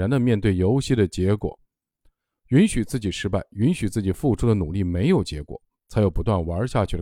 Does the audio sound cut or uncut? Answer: uncut